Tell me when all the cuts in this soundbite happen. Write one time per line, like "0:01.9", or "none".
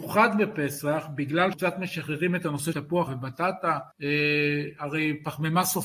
0:01.5
0:02.7
0:03.1
0:03.9